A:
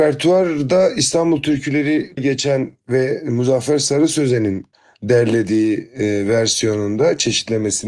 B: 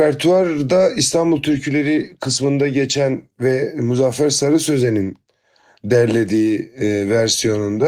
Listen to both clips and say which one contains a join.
A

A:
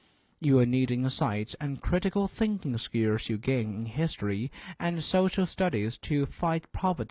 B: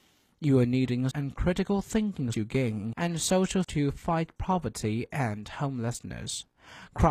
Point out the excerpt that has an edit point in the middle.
B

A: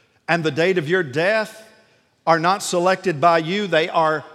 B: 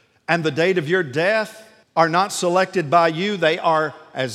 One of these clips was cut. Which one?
B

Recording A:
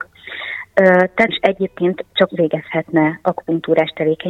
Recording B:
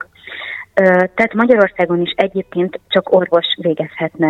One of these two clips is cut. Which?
A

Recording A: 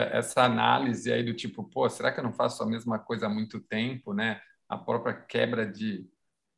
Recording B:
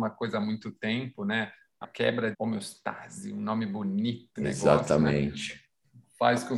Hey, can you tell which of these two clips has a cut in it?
B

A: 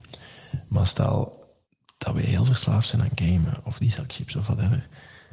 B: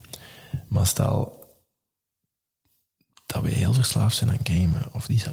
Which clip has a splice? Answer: A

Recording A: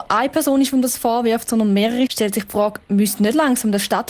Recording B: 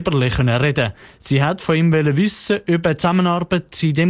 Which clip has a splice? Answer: A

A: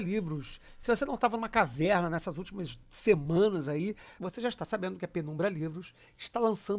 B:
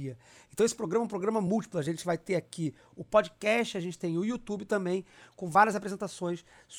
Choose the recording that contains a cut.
A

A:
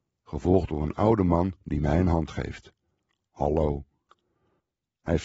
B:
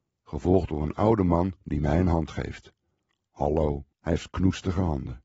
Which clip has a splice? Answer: B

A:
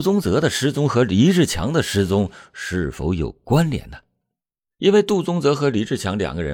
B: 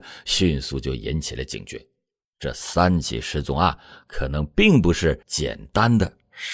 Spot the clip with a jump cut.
B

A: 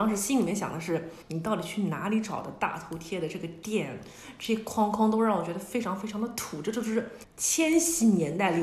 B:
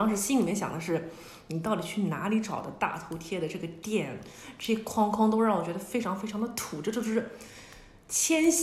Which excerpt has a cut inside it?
A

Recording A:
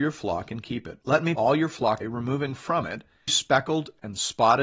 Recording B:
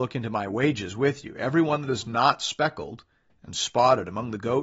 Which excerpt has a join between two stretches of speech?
A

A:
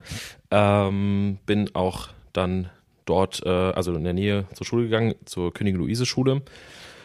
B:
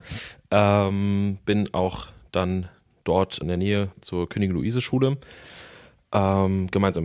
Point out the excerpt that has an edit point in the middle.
B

